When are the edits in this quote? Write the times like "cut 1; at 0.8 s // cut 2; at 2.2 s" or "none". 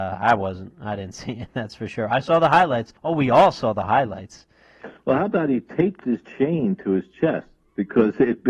cut 1; at 3.0 s